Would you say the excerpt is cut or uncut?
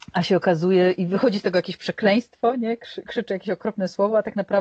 uncut